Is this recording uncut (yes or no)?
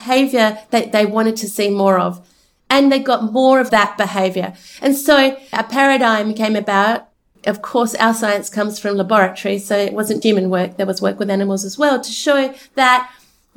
no